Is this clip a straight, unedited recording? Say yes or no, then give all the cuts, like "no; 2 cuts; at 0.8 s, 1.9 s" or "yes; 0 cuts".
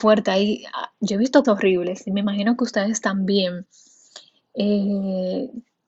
no; 1 cut; at 1.4 s